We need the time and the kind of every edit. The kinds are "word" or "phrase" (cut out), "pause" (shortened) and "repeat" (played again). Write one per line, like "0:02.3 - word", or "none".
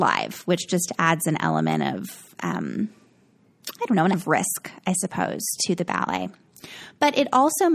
0:04.1 - word